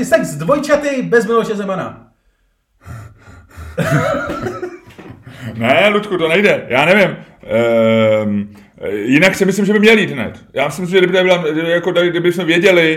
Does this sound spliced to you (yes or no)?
no